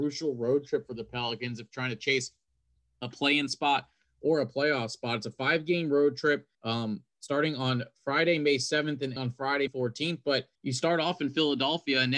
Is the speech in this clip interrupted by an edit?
yes; 4 cuts; at 6.5 s, 9.2 s, 9.7 s, 10.6 s

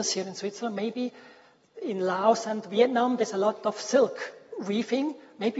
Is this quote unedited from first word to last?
yes; 0 cuts

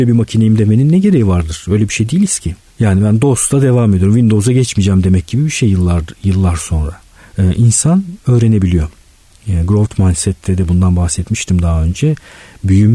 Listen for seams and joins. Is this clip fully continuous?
yes; 0 cuts

